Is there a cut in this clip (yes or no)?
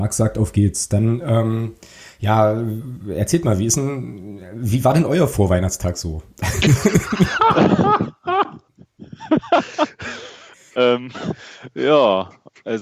no